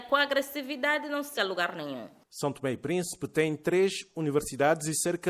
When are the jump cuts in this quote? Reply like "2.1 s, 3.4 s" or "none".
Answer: 1.3 s